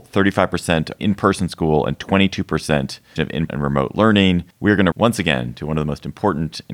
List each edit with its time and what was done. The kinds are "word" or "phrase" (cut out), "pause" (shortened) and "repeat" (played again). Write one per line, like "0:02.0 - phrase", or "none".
0:01.0 - phrase
0:03.2 - phrase
0:03.5 - word
0:04.5 - pause
0:04.9 - word